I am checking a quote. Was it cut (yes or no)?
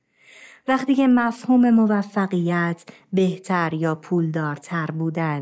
no